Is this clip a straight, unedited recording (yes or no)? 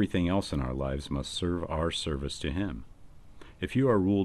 yes